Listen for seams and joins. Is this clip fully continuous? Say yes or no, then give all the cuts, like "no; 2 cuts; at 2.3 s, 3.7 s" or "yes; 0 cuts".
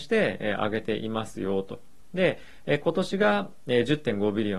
yes; 0 cuts